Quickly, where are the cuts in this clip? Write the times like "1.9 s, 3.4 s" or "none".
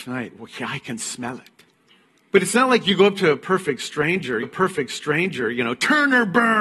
2.0 s, 4.4 s